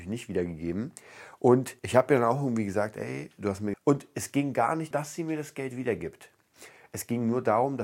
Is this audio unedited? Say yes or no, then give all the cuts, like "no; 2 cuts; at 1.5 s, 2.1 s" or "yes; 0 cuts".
no; 3 cuts; at 1.8 s, 3.7 s, 4.9 s